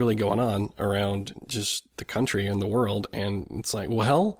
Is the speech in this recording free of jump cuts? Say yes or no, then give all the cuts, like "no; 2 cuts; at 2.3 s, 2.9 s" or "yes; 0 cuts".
yes; 0 cuts